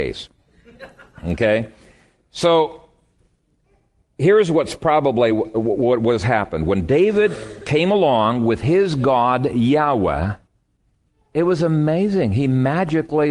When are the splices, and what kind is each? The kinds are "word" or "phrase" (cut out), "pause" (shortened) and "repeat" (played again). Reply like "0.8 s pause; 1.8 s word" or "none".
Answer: none